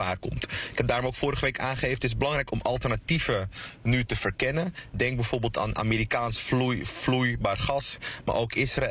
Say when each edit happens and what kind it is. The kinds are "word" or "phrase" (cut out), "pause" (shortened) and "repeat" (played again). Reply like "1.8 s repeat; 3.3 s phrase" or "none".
none